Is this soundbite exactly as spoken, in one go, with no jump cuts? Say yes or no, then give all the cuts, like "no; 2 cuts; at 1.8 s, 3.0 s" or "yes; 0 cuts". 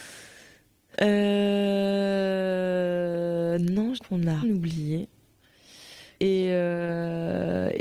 no; 3 cuts; at 4.0 s, 4.4 s, 6.2 s